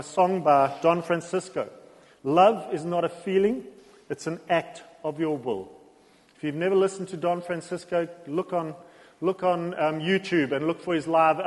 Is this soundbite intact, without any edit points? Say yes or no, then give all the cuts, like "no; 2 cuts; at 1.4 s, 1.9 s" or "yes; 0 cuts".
yes; 0 cuts